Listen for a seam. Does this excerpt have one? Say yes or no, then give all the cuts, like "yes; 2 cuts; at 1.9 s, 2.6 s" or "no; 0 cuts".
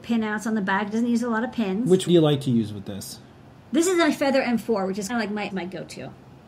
yes; 3 cuts; at 2.1 s, 5.1 s, 5.5 s